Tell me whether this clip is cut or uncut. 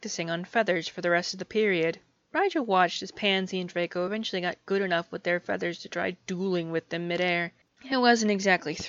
uncut